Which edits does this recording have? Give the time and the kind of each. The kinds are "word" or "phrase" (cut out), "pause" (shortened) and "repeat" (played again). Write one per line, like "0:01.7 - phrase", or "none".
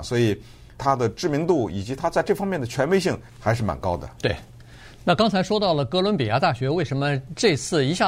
0:03.3 - pause